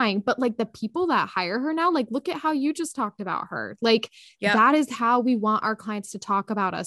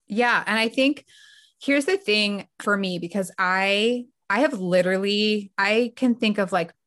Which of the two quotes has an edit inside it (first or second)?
second